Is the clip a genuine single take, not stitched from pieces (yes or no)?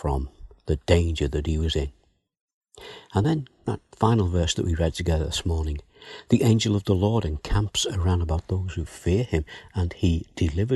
yes